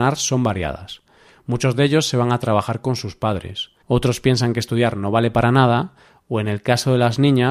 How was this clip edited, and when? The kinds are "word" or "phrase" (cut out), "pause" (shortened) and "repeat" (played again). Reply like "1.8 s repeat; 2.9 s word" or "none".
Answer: 3.8 s pause